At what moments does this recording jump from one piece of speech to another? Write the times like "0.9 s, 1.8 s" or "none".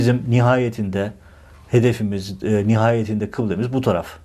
none